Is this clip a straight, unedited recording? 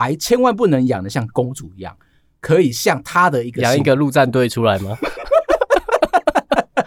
yes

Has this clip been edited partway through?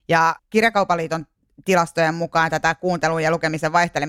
no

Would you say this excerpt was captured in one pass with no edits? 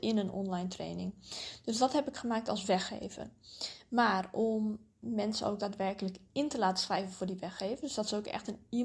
yes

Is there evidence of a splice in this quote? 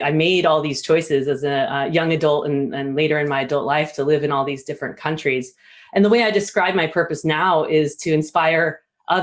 no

